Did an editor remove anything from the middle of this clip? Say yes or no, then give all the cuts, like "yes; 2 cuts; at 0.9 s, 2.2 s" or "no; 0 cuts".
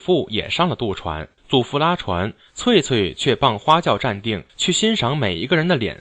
yes; 2 cuts; at 1.4 s, 4.5 s